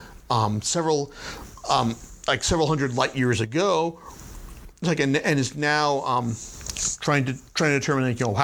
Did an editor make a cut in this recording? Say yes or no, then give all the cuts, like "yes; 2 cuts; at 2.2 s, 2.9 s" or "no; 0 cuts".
no; 0 cuts